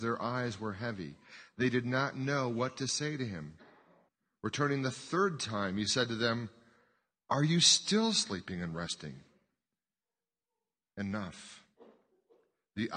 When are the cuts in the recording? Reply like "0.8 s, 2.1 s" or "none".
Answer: 4.1 s